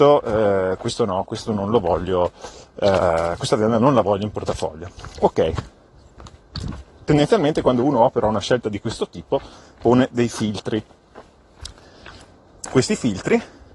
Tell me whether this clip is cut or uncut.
uncut